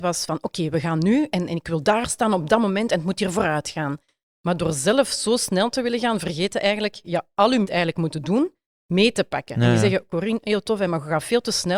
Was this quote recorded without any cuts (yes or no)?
no